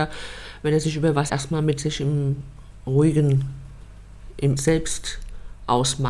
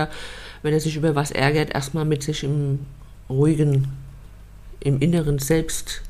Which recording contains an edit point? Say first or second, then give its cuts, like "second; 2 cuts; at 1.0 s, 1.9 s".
first; 2 cuts; at 1.3 s, 4.6 s